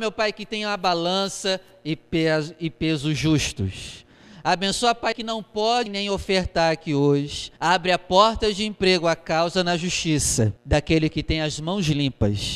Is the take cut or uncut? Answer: cut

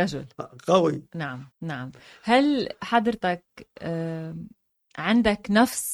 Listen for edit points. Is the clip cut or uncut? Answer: cut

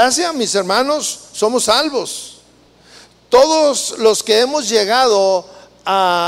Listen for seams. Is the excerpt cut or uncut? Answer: uncut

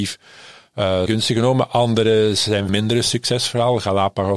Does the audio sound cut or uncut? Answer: cut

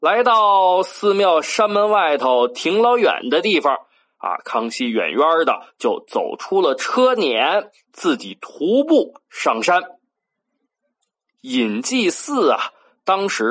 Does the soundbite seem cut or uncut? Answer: uncut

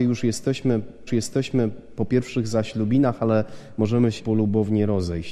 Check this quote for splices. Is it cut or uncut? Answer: cut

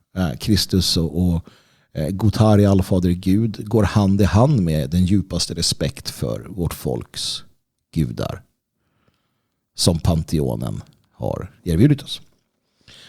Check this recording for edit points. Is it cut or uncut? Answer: uncut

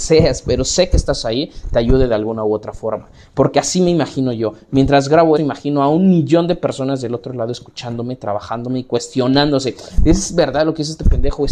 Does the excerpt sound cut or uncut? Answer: cut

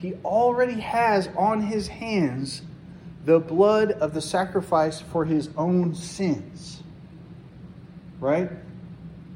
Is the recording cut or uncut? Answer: uncut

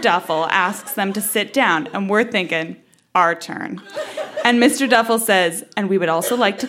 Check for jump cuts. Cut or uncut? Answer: uncut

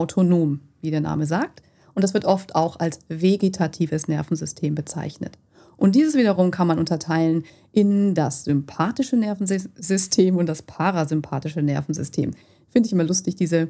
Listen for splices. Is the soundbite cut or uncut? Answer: uncut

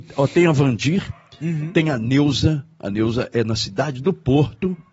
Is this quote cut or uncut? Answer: uncut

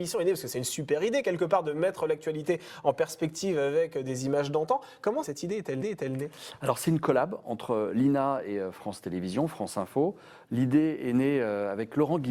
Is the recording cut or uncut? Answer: cut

